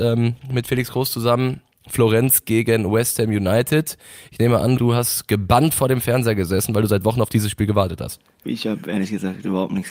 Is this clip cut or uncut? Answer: cut